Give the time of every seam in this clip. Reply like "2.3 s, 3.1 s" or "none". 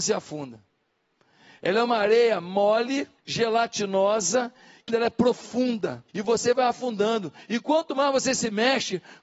3.2 s, 4.9 s, 6.1 s